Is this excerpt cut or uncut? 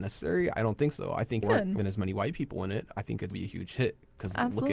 cut